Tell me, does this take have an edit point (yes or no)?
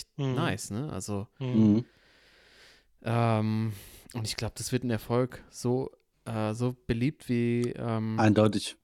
no